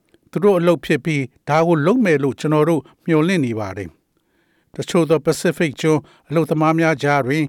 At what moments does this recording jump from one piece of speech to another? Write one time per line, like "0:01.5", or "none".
none